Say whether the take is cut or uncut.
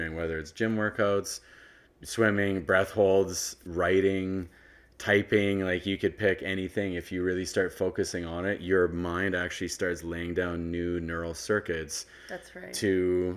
uncut